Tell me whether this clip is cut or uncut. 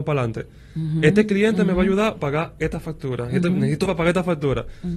cut